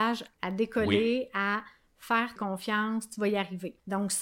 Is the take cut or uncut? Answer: cut